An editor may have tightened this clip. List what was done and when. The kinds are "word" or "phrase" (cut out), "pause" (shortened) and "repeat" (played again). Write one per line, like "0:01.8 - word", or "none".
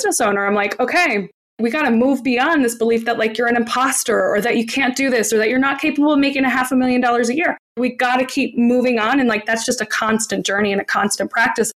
none

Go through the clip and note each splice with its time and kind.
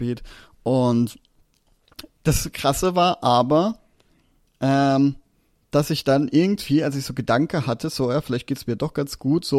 none

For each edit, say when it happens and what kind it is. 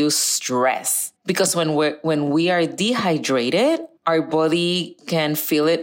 0:01.2 - pause
0:04.0 - pause

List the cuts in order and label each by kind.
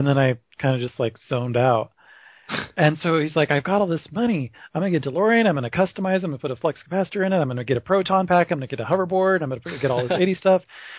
none

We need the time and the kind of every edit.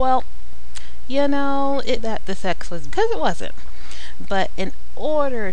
0:02.0 - word
0:02.9 - word

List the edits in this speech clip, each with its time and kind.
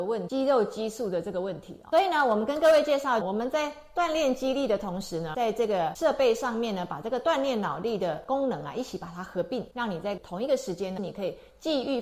0:03.2 - phrase

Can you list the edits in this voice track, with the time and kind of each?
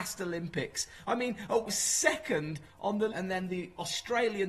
0:01.6 - phrase
0:03.1 - word

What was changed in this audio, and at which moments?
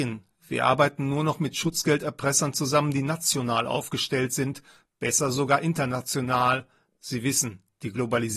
none

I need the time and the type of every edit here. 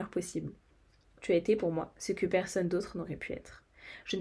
none

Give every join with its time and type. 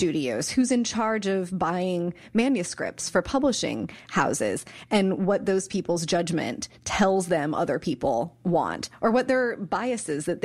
none

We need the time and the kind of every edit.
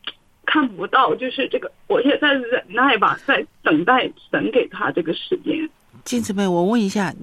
none

